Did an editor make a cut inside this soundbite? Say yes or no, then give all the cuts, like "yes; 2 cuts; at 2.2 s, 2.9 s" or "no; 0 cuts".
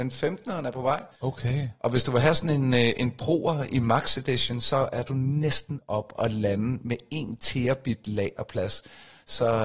yes; 1 cut; at 1.1 s